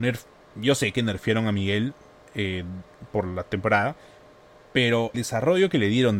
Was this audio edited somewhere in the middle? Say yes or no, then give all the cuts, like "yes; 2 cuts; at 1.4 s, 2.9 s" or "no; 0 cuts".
yes; 1 cut; at 5.1 s